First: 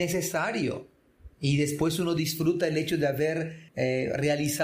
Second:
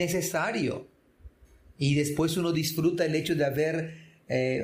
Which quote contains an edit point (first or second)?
first